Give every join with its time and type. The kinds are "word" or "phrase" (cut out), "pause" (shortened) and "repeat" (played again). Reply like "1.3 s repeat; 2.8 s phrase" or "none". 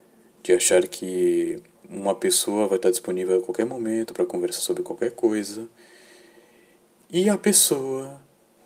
none